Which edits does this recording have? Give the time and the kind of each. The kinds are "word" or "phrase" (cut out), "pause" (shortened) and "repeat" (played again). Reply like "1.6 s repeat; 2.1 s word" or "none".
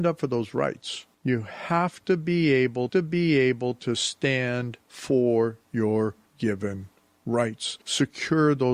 1.1 s pause; 2.9 s repeat; 4.8 s pause; 6.3 s word; 7.8 s pause